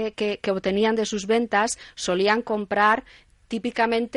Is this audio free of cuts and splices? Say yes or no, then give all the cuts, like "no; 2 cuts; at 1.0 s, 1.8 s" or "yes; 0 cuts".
yes; 0 cuts